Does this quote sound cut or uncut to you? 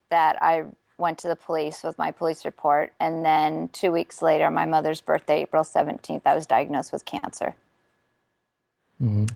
uncut